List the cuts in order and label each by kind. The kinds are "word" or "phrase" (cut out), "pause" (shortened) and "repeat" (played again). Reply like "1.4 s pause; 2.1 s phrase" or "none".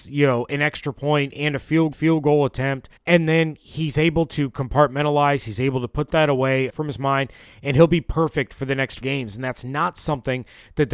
1.9 s repeat; 3.0 s pause; 6.7 s word; 9.0 s word